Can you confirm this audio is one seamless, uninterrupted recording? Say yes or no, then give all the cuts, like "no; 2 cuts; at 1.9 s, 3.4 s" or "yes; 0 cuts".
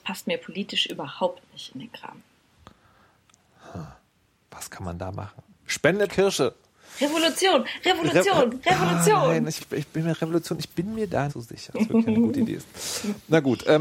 no; 4 cuts; at 6.1 s, 9.6 s, 11.3 s, 11.7 s